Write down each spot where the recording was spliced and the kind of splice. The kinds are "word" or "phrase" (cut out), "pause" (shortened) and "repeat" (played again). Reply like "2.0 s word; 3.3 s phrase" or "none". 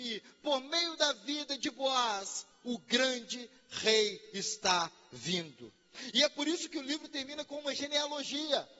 none